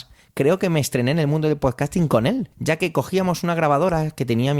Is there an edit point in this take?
yes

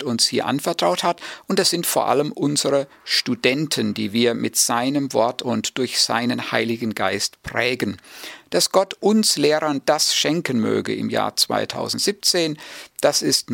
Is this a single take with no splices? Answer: yes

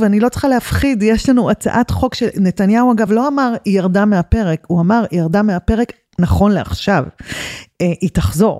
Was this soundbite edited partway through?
no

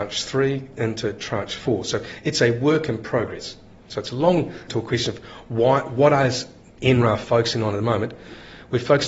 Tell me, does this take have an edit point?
yes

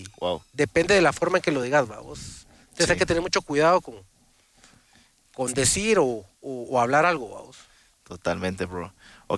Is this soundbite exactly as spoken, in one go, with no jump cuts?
yes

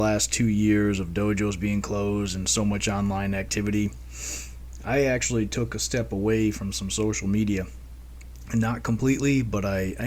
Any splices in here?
no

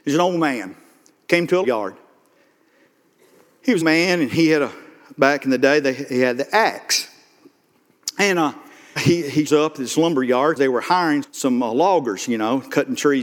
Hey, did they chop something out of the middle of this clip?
yes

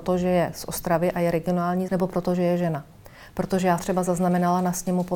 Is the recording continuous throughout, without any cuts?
no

